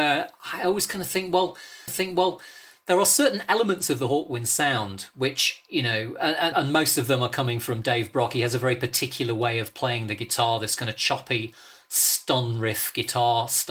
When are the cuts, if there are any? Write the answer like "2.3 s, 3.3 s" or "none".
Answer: 1.9 s, 6.5 s